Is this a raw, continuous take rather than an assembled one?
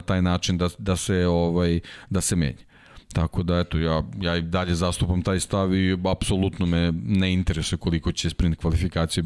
yes; 0 cuts

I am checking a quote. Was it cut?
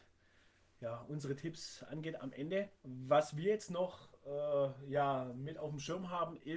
yes; 1 cut; at 2.8 s

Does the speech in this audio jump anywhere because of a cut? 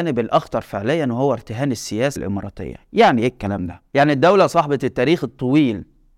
yes; 1 cut; at 2.2 s

